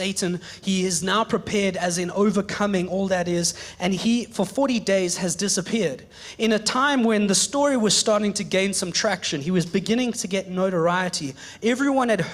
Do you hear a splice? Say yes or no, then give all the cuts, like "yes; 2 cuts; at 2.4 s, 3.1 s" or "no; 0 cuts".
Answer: no; 0 cuts